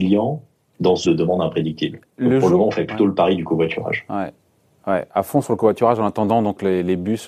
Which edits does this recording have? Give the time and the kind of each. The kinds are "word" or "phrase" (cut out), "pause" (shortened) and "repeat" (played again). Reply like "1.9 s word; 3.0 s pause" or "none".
1.0 s word